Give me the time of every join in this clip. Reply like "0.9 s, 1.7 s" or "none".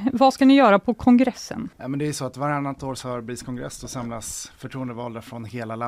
1.7 s

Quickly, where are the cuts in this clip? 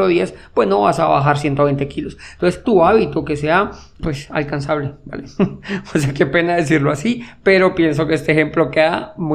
2.6 s, 4.0 s

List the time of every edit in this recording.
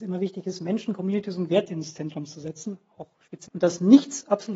3.5 s

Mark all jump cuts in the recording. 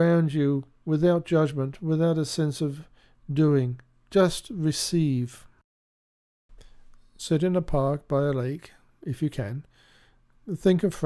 none

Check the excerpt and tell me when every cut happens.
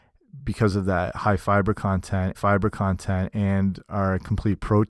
2.3 s

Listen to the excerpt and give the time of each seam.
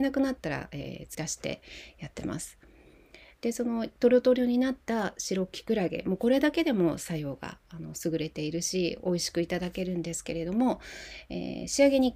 1.1 s

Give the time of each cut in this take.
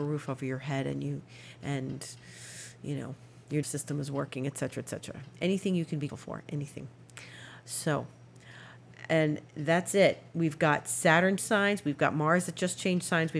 3.6 s, 6.1 s, 11.4 s

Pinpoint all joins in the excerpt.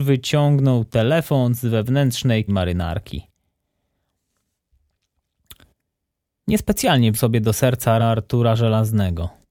2.5 s, 7.1 s, 8.0 s

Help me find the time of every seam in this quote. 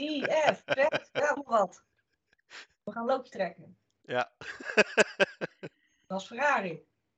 1.4 s

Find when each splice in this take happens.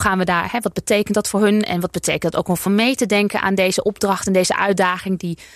2.7 s

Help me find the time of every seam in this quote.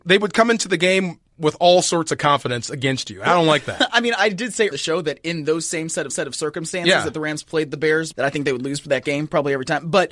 4.7 s, 6.1 s, 8.1 s

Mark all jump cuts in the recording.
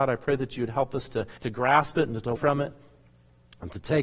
1.4 s, 2.4 s

